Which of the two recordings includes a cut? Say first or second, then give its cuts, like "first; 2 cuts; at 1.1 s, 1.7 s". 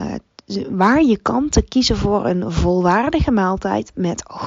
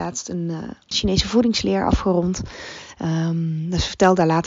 second; 1 cut; at 0.9 s